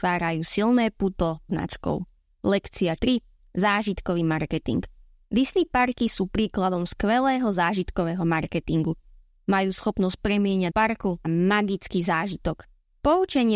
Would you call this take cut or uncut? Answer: cut